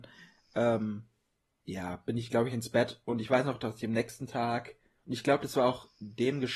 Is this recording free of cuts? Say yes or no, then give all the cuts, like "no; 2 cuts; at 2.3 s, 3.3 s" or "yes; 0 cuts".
yes; 0 cuts